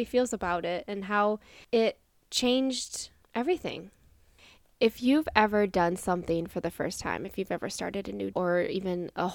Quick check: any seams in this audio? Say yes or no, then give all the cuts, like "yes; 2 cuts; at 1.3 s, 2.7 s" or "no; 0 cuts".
yes; 1 cut; at 8.3 s